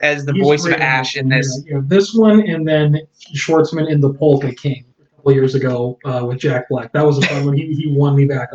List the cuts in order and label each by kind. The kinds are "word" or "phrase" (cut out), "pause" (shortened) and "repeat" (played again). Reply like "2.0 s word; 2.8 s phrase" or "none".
4.9 s pause